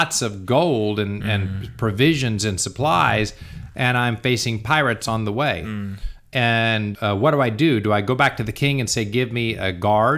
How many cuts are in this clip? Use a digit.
1